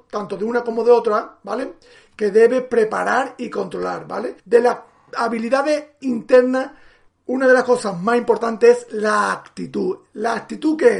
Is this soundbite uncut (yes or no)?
no